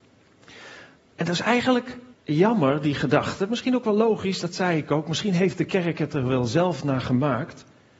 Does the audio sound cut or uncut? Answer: cut